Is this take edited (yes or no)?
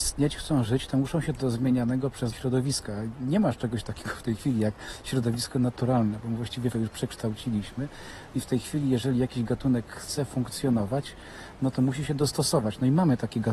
yes